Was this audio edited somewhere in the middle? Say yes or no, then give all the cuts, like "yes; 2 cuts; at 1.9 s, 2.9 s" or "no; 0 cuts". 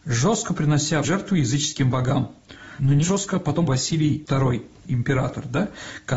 yes; 3 cuts; at 1.0 s, 3.0 s, 3.7 s